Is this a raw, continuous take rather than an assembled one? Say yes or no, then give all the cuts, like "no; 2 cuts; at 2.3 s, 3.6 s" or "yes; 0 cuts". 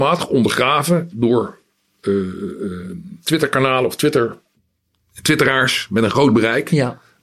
yes; 0 cuts